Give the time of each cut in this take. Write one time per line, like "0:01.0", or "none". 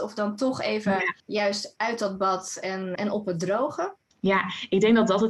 0:01.2
0:03.0
0:04.1